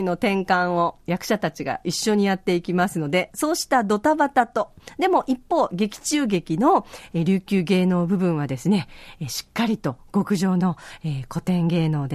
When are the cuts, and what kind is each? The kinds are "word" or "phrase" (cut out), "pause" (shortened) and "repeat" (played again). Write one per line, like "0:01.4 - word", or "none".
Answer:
none